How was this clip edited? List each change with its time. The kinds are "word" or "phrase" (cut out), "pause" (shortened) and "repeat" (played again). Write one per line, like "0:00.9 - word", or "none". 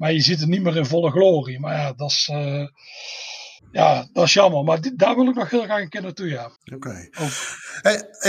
0:03.6 - pause
0:06.6 - pause

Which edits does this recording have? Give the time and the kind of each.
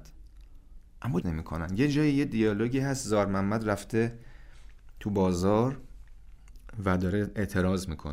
0:01.2 - word

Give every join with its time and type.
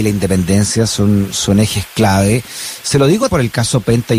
0:03.3 - word

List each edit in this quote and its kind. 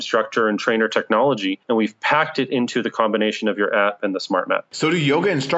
none

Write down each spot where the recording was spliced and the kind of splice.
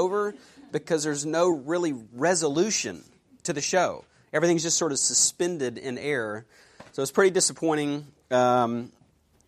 none

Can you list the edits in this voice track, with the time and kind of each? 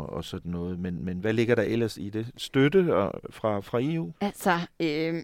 0:04.1 - pause

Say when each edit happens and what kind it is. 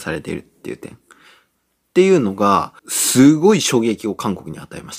0:02.8 - pause

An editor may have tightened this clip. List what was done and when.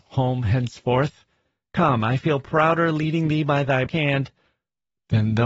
0:03.9 - word

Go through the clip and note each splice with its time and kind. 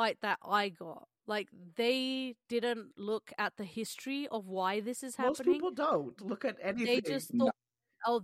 0:01.2 - pause

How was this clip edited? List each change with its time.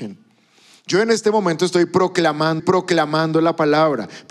0:02.6 - repeat

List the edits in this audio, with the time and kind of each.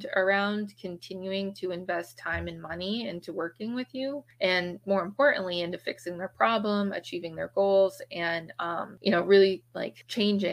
0:04.8 - word

